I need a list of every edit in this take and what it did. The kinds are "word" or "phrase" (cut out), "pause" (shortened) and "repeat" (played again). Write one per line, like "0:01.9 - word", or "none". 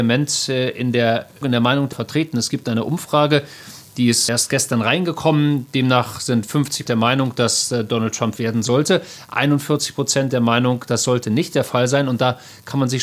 0:01.4 - word
0:01.9 - word
0:04.3 - word
0:06.9 - word
0:08.4 - word
0:10.3 - word